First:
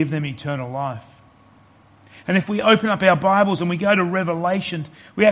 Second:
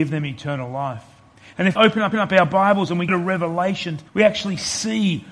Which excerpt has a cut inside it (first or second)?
second